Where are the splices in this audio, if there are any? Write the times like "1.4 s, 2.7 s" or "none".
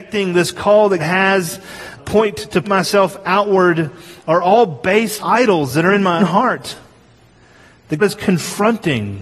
1.0 s, 2.0 s, 2.6 s, 5.2 s, 6.2 s, 8.0 s